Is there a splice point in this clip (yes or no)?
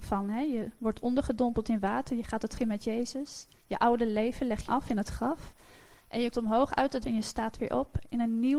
yes